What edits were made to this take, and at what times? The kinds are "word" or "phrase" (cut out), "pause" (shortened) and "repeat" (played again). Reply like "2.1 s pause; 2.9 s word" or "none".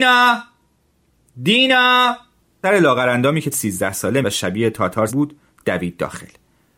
2.6 s word; 3.5 s word; 4.2 s word; 5.1 s word